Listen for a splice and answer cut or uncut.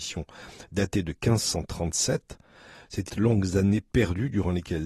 cut